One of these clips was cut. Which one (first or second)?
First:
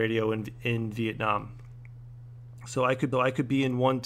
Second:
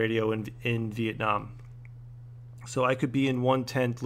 first